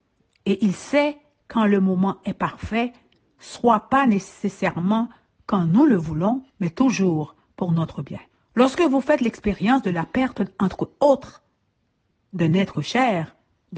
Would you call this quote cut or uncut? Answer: cut